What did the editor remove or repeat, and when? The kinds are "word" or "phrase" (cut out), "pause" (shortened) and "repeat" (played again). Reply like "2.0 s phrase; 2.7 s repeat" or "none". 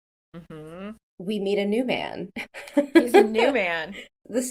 2.3 s pause